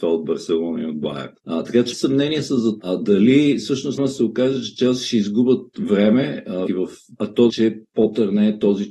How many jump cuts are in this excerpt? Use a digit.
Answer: 7